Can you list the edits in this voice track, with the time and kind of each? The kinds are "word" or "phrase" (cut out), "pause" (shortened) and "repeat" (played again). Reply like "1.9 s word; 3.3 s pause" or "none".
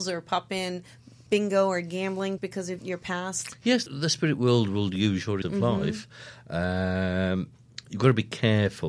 1.3 s word; 2.4 s word; 2.8 s word; 3.9 s word; 5.4 s word